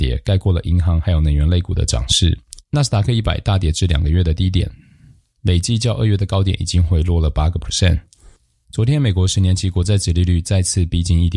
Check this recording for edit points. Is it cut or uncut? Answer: uncut